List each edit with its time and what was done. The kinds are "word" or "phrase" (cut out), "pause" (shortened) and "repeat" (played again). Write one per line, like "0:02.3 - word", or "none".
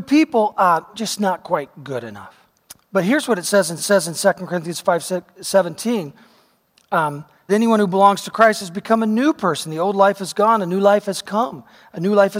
0:00.9 - word
0:02.6 - pause
0:03.8 - repeat
0:07.5 - phrase